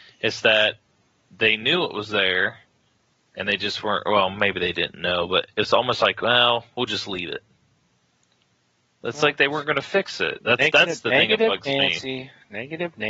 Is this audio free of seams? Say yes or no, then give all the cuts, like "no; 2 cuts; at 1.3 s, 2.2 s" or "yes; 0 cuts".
yes; 0 cuts